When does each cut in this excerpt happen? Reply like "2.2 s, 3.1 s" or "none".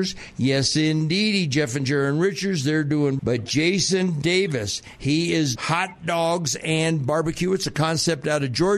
3.2 s, 5.6 s